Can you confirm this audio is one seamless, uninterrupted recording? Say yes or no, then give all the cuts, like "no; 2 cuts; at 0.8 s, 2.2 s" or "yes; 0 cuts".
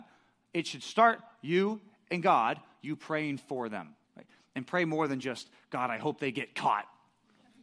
no; 1 cut; at 4.0 s